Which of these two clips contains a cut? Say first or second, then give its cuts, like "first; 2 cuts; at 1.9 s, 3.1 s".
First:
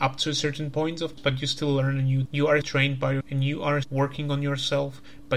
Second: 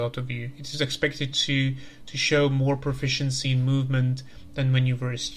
first; 5 cuts; at 1.2 s, 2.3 s, 2.6 s, 3.2 s, 3.8 s